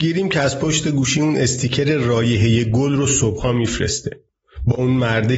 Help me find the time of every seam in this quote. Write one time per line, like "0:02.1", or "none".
none